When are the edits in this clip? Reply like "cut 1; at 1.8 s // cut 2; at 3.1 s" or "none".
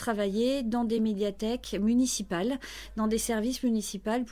none